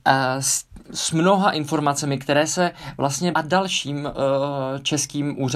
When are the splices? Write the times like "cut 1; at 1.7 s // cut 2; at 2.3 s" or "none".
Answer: cut 1; at 3.3 s